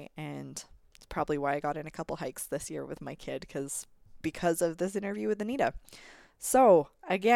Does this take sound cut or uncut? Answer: uncut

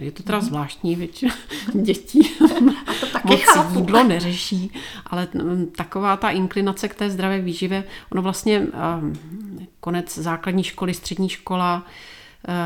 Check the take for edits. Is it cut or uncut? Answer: uncut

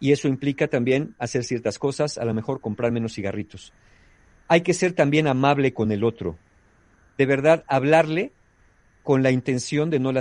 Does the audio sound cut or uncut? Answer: uncut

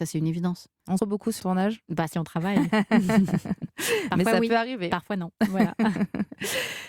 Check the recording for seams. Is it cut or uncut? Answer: cut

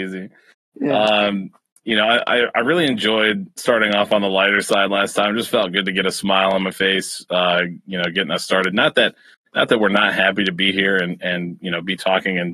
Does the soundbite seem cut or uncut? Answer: uncut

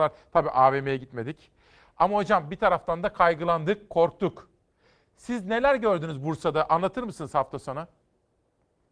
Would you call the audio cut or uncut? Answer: uncut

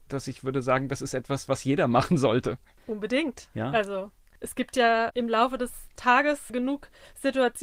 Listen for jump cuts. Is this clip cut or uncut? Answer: uncut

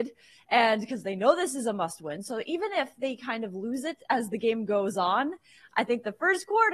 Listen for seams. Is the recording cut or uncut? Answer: uncut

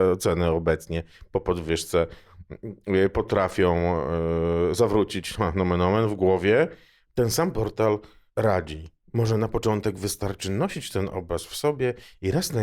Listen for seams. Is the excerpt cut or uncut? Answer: uncut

